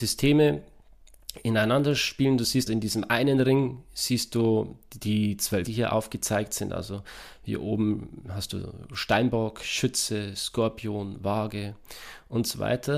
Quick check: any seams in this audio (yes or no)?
yes